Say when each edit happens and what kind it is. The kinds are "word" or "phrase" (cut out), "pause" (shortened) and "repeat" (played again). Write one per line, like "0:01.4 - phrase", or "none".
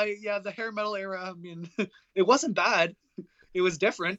none